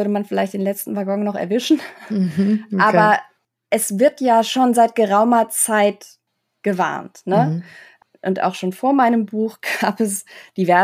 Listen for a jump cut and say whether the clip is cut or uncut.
uncut